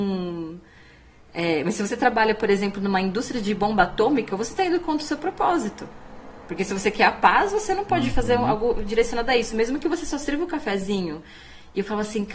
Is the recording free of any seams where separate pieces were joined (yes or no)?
yes